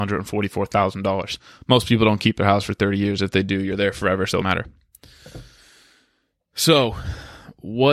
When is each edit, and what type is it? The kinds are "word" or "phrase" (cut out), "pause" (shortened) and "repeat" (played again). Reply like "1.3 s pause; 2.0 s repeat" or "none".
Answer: 4.4 s phrase